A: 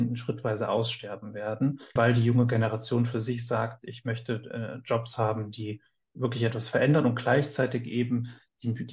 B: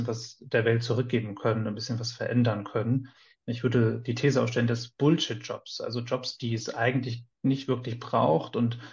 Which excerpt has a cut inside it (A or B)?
A